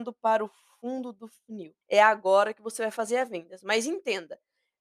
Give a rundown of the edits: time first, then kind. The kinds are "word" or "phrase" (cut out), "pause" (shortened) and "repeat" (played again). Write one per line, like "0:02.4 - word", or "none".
0:01.8 - pause